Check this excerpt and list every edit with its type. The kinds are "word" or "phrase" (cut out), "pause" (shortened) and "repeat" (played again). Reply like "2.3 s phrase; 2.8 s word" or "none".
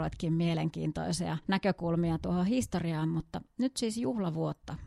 1.4 s pause